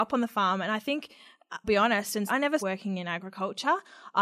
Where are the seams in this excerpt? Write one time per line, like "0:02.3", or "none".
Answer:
0:01.6
0:02.3
0:02.6